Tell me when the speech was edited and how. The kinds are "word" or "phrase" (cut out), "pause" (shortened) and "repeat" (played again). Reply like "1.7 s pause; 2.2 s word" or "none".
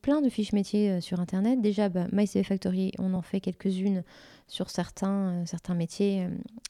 none